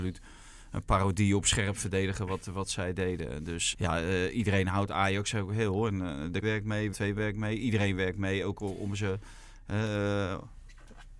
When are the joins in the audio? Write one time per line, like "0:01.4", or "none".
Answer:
0:03.7
0:06.4
0:06.9